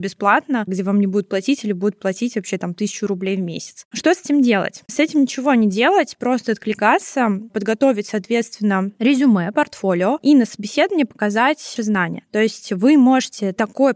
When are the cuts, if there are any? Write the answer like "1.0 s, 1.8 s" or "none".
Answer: 11.8 s

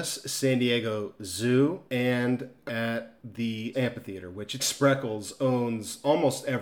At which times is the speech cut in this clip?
1.9 s, 2.7 s, 3.7 s, 4.6 s

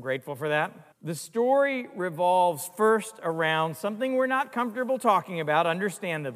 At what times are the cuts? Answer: 0.9 s

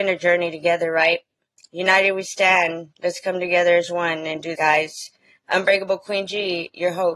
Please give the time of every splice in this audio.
4.5 s

